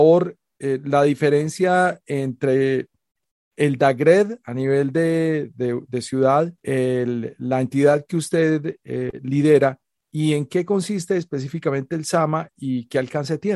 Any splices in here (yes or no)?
yes